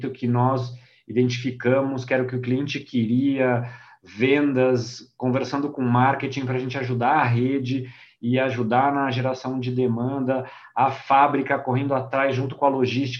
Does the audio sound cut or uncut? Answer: uncut